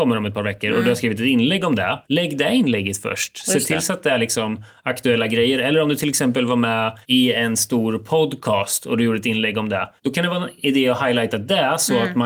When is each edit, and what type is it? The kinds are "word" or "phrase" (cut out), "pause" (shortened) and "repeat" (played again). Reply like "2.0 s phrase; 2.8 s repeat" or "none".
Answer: 2.0 s pause; 7.0 s pause; 10.0 s pause